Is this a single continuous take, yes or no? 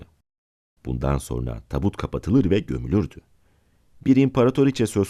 yes